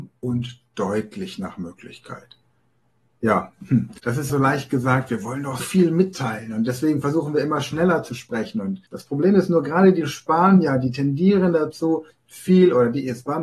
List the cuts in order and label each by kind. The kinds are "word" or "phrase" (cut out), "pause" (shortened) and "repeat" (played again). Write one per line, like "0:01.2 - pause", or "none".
0:04.0 - pause
0:04.3 - word
0:05.6 - word
0:08.9 - pause
0:12.1 - pause